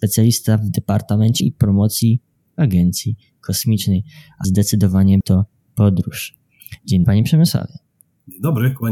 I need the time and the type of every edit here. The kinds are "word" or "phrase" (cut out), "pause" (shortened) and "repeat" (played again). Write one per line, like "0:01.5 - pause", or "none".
0:01.4 - word
0:02.5 - word
0:04.4 - word
0:05.2 - word
0:05.7 - word
0:07.0 - word

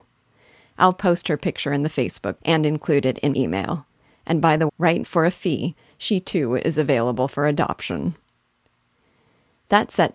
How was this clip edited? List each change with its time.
0:02.4 - word
0:03.3 - word
0:04.7 - word
0:05.0 - word

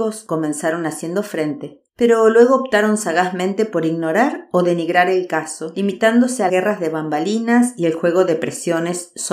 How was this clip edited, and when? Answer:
0:01.9 - pause
0:06.5 - word

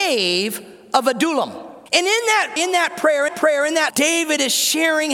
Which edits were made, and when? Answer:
0:01.9 - pause
0:02.6 - word
0:03.3 - repeat
0:03.9 - word

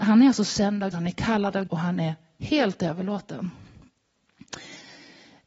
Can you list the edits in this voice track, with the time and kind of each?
0:00.9 - word
0:01.7 - word

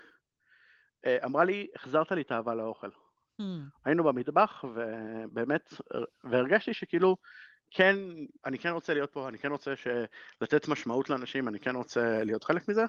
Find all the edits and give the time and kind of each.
0:08.3 - pause

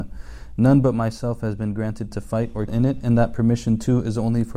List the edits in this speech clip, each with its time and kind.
0:02.1 - word
0:02.7 - word

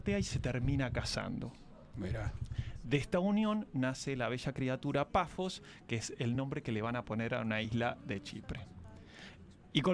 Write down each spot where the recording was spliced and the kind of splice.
none

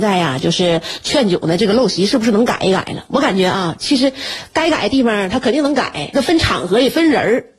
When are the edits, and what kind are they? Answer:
0:06.1 - phrase

